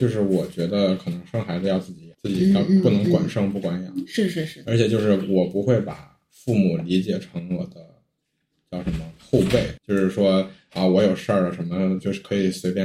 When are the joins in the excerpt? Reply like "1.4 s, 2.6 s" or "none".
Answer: 2.1 s, 9.8 s